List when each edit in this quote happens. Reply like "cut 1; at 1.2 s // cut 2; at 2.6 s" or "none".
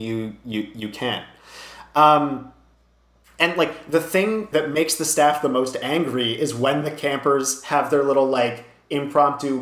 cut 1; at 4.5 s